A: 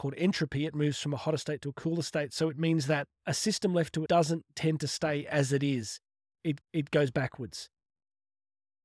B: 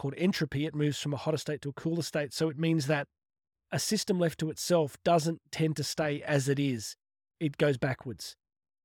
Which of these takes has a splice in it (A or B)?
A